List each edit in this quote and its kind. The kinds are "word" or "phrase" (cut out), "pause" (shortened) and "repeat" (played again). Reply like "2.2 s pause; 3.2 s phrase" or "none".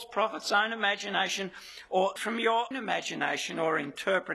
2.2 s word; 2.7 s word